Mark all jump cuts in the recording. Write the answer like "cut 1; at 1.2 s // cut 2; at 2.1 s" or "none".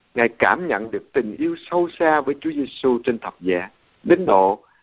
cut 1; at 3.9 s